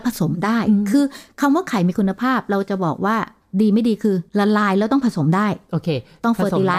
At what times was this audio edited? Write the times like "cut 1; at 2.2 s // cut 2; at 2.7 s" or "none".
cut 1; at 4.3 s